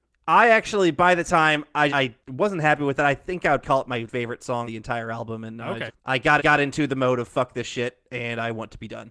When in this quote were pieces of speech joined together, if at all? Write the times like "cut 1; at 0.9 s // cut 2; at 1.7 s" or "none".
cut 1; at 1.9 s // cut 2; at 2.2 s // cut 3; at 3.6 s // cut 4; at 4.1 s // cut 5; at 4.6 s // cut 6; at 5.9 s // cut 7; at 6.4 s